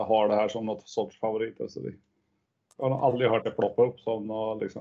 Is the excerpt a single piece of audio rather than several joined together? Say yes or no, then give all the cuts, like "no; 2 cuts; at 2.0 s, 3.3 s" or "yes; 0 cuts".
yes; 0 cuts